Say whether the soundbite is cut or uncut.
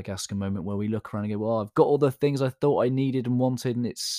uncut